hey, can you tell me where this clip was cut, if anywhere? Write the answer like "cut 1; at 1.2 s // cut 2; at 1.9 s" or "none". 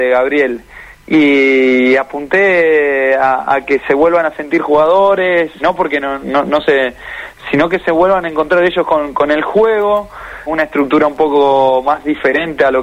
cut 1; at 5.6 s // cut 2; at 10.5 s